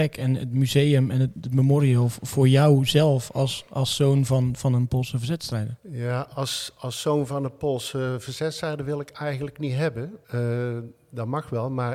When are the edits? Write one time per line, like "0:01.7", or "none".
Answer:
0:10.2